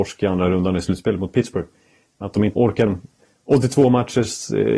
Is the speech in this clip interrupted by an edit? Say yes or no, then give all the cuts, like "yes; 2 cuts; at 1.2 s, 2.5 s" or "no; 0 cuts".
yes; 2 cuts; at 2.5 s, 2.9 s